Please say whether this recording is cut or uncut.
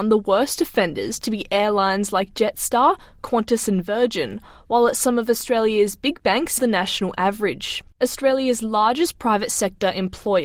cut